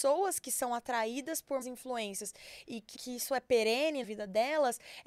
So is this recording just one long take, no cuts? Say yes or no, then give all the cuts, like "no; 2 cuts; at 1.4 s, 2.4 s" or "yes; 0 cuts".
no; 3 cuts; at 1.6 s, 2.9 s, 4.0 s